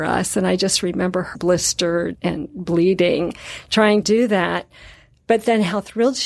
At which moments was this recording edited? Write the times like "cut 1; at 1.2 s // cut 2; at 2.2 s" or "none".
cut 1; at 1.3 s // cut 2; at 2.1 s // cut 3; at 4.0 s